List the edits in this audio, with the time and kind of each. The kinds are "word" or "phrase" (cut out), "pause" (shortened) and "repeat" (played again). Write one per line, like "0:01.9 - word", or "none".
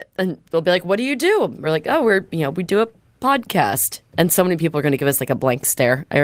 none